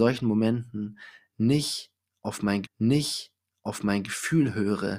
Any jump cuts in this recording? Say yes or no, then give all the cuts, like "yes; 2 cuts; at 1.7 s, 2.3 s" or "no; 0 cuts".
yes; 1 cut; at 2.6 s